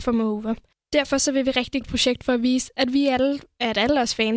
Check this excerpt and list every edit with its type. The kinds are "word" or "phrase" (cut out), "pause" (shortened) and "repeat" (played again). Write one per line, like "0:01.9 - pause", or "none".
0:01.8 - phrase